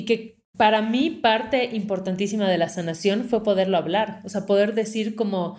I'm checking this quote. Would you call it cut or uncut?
uncut